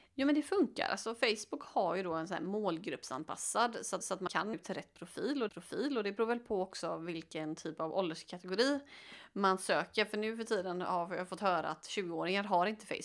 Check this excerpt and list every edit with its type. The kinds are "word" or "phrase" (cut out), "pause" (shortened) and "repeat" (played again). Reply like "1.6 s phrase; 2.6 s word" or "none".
4.0 s repeat; 4.5 s word; 5.5 s repeat